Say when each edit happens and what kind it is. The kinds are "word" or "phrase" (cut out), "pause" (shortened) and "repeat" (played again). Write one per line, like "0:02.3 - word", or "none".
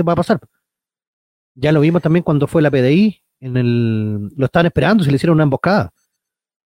none

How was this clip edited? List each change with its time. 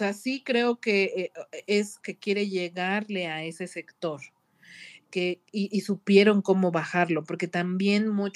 0:02.0 - word

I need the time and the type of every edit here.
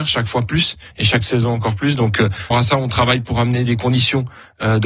0:02.5 - phrase

